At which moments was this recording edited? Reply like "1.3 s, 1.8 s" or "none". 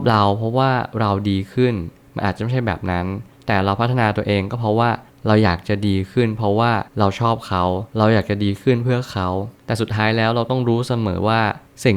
6.9 s, 7.9 s, 9.6 s